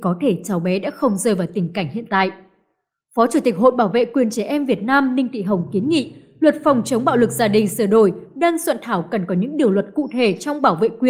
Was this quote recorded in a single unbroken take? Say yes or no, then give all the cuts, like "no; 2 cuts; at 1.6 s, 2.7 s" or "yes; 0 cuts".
yes; 0 cuts